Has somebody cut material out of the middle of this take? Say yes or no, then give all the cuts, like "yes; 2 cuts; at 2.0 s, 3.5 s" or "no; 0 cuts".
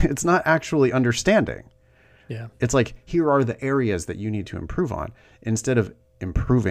no; 0 cuts